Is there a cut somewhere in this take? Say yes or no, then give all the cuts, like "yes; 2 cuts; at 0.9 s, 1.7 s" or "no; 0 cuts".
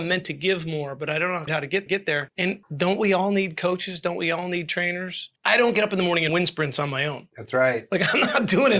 yes; 4 cuts; at 1.5 s, 1.9 s, 5.4 s, 6.3 s